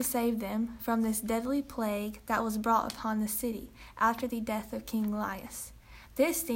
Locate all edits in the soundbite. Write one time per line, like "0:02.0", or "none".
none